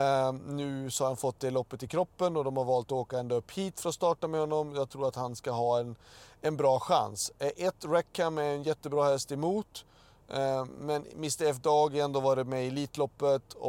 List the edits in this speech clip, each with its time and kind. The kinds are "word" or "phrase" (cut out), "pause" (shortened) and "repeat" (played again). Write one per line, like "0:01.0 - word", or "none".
none